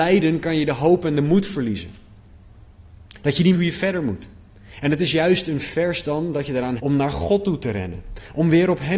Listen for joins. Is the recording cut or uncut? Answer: cut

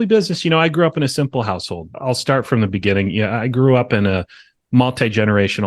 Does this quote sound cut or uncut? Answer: uncut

